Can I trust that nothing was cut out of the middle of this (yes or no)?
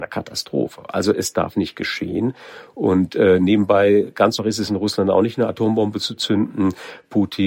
no